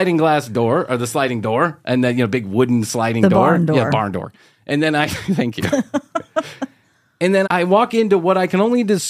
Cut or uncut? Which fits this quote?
cut